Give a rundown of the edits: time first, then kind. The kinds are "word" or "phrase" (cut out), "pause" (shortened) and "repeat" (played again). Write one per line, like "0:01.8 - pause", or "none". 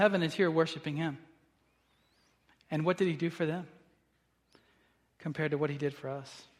none